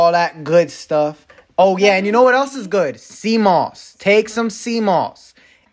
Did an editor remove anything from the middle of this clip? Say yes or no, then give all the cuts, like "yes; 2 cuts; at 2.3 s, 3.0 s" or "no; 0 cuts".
no; 0 cuts